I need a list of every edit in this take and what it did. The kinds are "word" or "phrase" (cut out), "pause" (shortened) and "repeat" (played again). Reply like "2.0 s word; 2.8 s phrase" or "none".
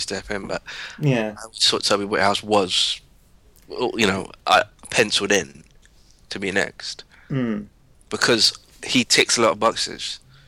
none